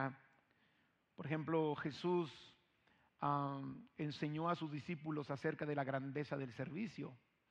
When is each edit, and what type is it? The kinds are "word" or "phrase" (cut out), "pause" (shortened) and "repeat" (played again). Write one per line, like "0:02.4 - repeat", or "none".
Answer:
none